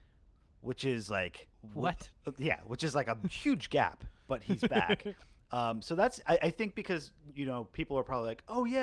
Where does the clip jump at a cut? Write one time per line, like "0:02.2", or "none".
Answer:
0:01.5